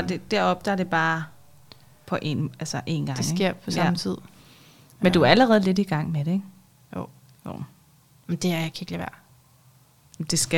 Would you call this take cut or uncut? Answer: uncut